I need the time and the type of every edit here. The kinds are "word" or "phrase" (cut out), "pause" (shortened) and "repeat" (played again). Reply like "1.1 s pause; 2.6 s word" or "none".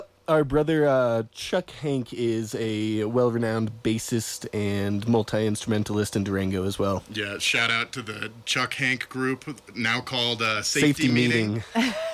none

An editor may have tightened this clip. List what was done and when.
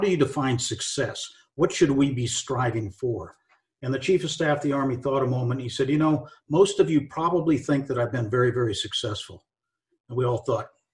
none

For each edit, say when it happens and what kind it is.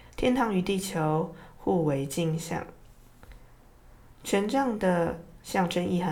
none

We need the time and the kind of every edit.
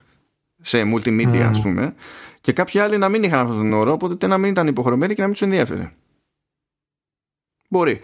none

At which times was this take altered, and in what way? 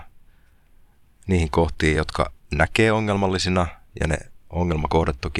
none

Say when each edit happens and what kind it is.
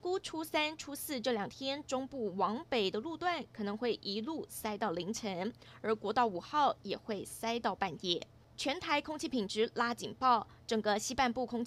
8.3 s pause

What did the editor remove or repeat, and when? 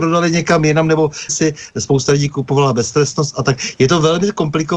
1.3 s phrase

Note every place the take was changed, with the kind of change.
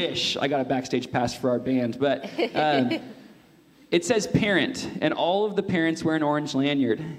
none

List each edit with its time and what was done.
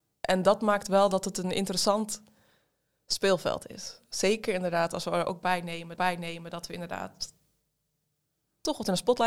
6.0 s repeat

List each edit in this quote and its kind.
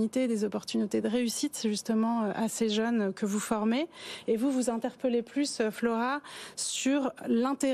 none

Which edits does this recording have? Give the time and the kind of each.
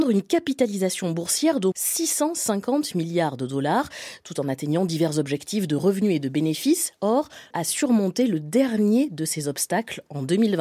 1.7 s word; 7.5 s word

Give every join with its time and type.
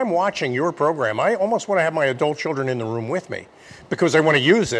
none

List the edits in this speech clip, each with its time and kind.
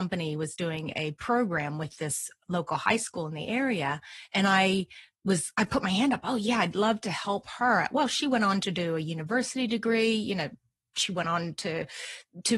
none

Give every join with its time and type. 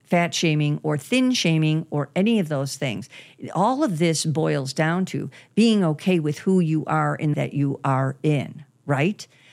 7.3 s phrase

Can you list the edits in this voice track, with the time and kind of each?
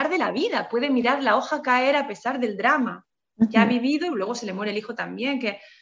none

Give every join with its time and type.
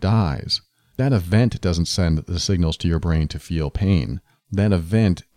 none

